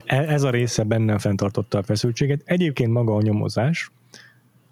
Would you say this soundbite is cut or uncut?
uncut